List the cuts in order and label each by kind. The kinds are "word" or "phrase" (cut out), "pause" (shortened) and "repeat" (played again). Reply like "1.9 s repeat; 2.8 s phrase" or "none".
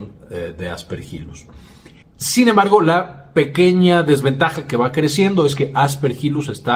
2.0 s pause